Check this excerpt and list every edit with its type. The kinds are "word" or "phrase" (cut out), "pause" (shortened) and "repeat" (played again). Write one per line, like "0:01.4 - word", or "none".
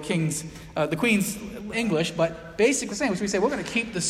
0:01.7 - word
0:02.9 - word